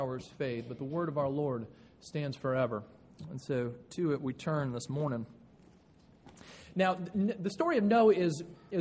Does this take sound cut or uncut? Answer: uncut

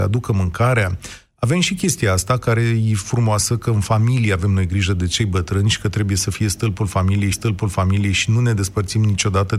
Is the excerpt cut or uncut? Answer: cut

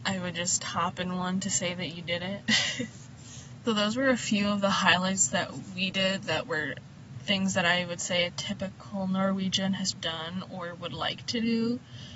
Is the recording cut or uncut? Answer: cut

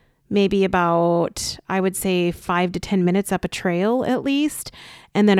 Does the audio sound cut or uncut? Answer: uncut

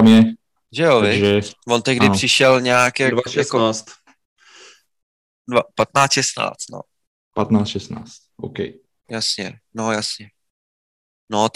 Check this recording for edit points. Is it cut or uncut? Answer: uncut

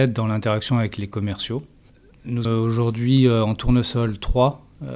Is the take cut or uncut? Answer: cut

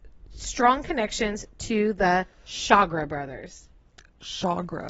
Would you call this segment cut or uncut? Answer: uncut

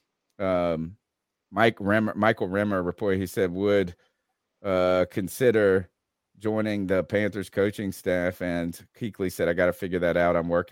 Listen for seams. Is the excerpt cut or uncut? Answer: uncut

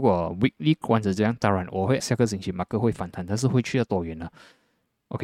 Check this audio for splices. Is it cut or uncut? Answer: cut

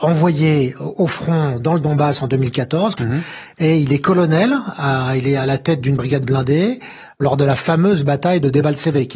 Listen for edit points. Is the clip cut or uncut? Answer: cut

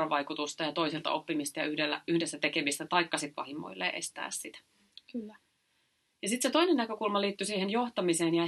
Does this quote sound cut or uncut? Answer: uncut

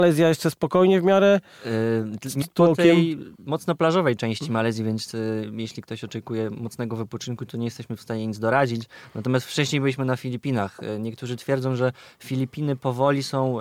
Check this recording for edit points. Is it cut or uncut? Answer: cut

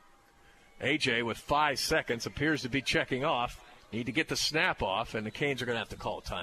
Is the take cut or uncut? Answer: uncut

